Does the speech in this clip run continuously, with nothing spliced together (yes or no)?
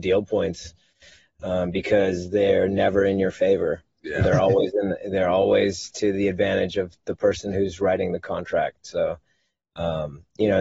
yes